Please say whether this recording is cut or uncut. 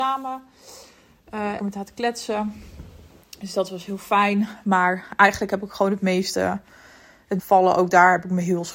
cut